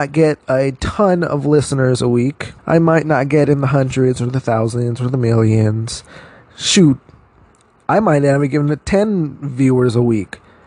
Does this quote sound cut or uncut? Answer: cut